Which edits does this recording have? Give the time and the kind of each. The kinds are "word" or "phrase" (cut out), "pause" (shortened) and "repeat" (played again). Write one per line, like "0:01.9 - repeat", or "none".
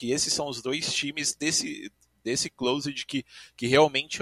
none